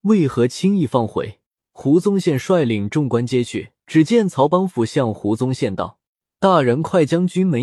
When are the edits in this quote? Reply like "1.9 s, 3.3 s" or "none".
1.5 s, 3.8 s, 6.1 s

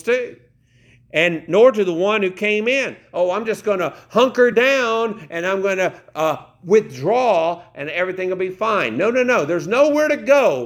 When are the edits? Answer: none

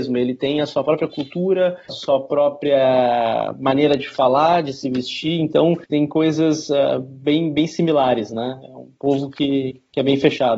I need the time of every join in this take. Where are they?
none

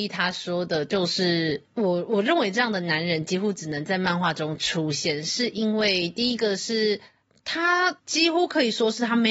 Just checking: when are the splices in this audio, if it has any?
1.6 s, 8.0 s

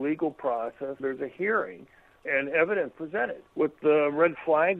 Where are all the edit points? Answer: 1.0 s, 2.3 s, 2.9 s, 3.5 s

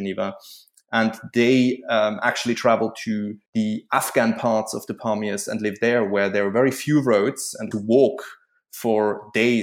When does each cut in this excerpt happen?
3.5 s, 7.7 s

